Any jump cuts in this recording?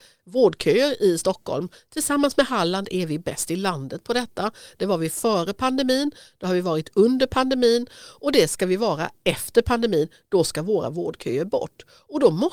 no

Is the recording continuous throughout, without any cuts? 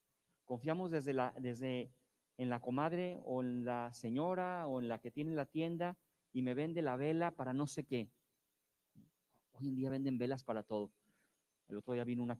yes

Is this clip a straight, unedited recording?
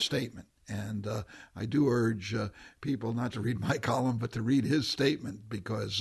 no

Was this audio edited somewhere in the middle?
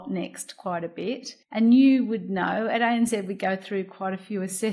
yes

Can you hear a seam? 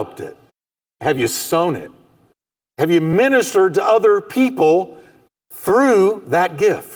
no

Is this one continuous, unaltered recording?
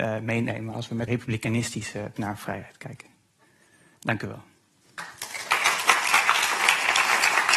no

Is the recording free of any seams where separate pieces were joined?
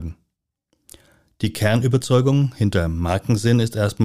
yes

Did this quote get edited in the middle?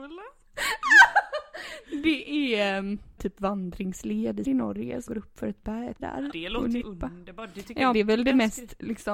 yes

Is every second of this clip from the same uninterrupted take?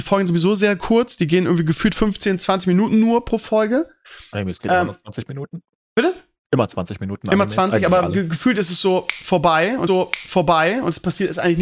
no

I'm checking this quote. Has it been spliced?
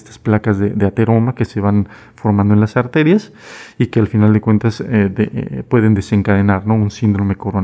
no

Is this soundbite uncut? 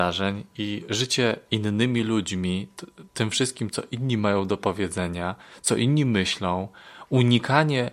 yes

